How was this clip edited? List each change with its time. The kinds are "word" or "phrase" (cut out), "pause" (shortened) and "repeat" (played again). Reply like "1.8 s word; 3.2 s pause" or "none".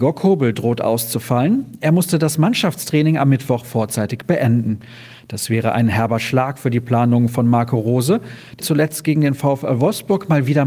8.6 s phrase